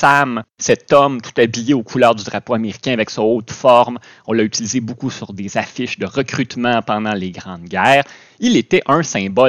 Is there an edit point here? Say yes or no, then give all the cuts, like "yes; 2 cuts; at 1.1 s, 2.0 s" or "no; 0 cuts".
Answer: no; 0 cuts